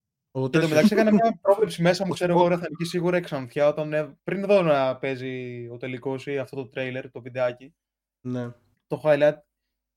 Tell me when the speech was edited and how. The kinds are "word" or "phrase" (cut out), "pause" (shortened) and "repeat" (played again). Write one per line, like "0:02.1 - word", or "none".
0:04.2 - pause
0:08.7 - pause